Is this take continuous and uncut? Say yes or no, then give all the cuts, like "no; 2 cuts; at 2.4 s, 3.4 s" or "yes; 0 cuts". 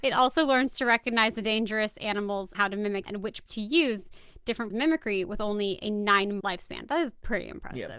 no; 5 cuts; at 2.5 s, 3.1 s, 3.5 s, 4.7 s, 6.4 s